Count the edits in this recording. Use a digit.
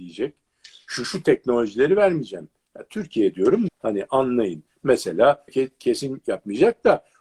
3